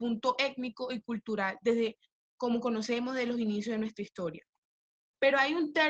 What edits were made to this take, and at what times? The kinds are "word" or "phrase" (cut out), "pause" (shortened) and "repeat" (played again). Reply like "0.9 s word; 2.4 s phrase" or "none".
none